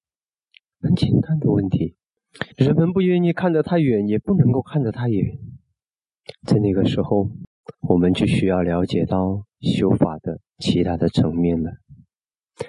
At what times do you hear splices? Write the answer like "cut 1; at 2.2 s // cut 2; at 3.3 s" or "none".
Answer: cut 1; at 2.5 s // cut 2; at 7.7 s